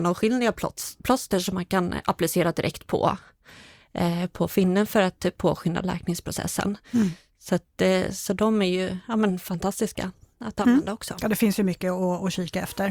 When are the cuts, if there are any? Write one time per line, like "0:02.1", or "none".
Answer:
none

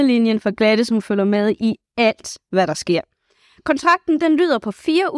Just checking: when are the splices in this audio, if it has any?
none

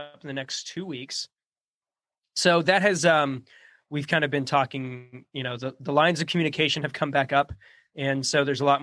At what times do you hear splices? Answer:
none

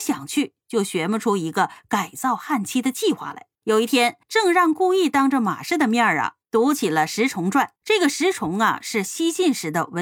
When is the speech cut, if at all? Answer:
0:03.5
0:04.2
0:07.8

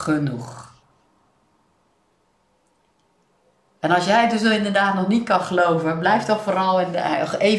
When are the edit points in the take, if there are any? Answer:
none

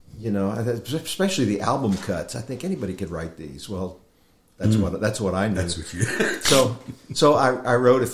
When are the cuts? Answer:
none

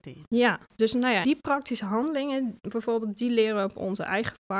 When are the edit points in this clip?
0:01.2

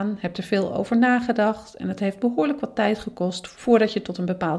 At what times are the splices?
none

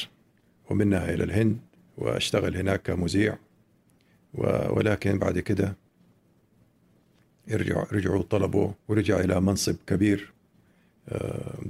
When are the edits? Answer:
0:01.8
0:08.8

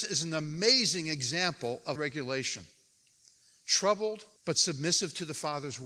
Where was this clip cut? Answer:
0:02.0
0:04.4

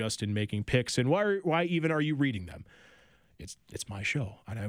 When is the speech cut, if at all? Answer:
none

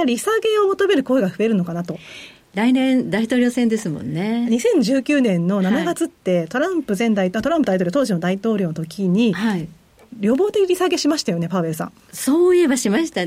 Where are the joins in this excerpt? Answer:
none

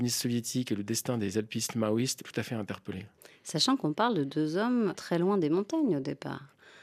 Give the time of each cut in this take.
0:02.2
0:04.9

